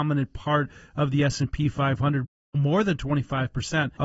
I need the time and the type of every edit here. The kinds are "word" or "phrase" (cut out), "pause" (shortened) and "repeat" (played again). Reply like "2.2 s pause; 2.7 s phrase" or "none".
none